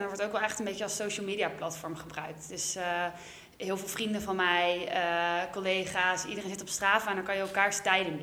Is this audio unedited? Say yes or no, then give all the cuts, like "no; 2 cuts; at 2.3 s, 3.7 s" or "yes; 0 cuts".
yes; 0 cuts